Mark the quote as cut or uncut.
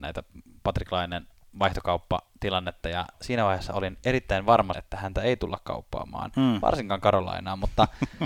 cut